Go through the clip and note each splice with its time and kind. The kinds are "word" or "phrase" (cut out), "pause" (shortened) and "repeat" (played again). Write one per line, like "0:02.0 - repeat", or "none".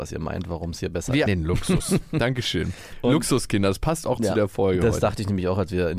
0:01.3 - word
0:04.2 - phrase